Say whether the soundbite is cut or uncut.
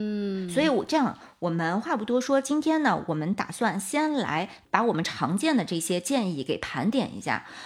uncut